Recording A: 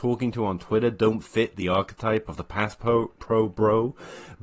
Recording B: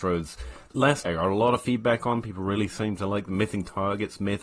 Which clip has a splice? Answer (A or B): B